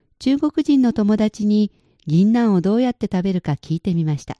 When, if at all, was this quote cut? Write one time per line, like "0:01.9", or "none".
none